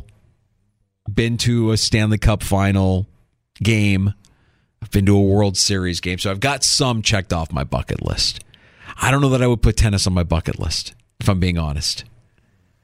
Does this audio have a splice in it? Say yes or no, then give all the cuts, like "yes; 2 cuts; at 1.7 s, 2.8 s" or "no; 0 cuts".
no; 0 cuts